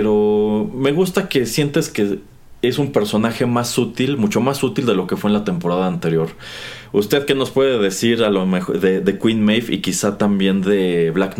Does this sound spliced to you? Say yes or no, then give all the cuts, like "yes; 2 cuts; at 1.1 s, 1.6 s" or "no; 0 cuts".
no; 0 cuts